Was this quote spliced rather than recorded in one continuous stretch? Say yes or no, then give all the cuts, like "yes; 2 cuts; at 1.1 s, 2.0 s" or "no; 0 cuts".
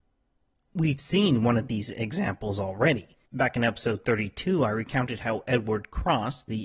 yes; 1 cut; at 3.3 s